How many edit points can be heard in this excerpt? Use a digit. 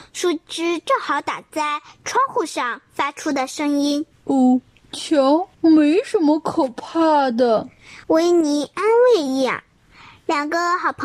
3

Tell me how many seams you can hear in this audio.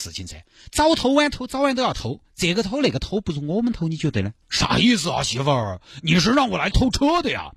2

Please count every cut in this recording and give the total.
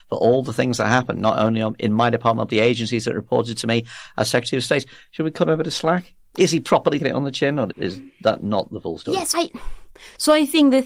4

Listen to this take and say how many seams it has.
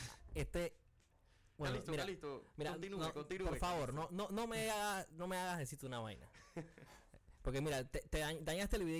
0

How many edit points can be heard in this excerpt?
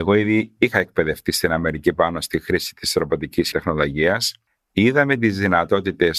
0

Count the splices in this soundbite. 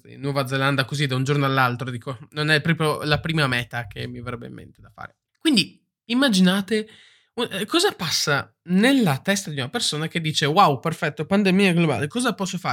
1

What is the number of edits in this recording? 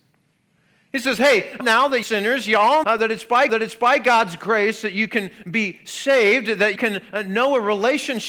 5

